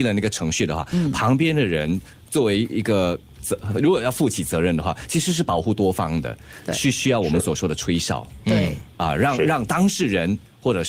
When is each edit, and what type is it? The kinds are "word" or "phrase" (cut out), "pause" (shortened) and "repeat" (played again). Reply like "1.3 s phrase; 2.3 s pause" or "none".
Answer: 3.3 s pause